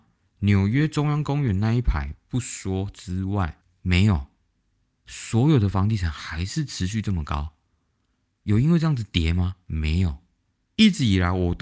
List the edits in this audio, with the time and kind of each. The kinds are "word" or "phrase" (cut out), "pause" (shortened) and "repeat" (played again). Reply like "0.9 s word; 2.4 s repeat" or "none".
none